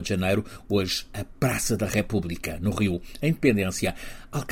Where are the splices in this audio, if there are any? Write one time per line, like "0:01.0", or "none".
none

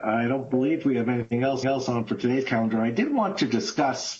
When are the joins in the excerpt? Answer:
0:01.6

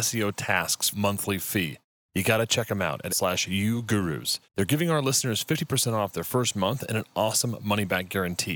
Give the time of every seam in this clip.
0:00.9
0:03.1
0:04.5

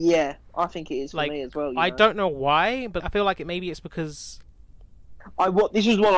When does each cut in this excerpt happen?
0:03.0

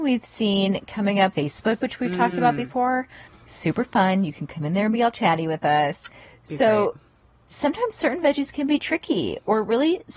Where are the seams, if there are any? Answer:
0:01.3
0:01.8
0:03.3

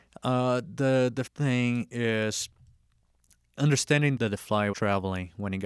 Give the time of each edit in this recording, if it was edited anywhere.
0:01.3
0:04.2
0:04.7

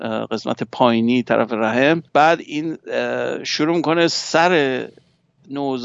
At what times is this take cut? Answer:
0:02.1

